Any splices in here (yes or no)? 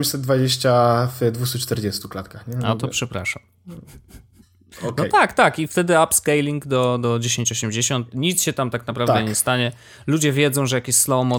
no